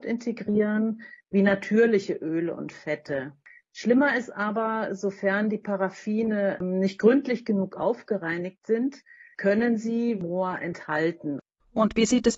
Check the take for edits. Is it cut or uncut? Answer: uncut